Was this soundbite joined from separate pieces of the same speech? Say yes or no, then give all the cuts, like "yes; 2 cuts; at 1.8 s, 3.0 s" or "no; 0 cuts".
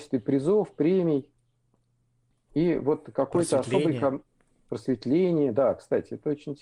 no; 0 cuts